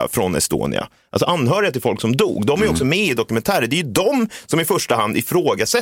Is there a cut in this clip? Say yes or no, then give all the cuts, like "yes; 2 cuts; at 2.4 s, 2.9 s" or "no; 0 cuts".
no; 0 cuts